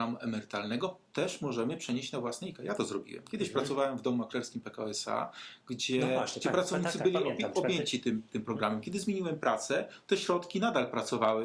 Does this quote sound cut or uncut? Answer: uncut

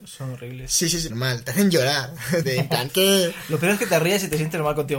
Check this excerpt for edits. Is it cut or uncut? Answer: cut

